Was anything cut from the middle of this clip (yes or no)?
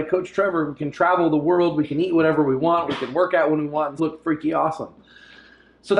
yes